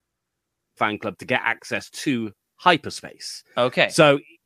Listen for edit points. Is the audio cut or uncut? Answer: uncut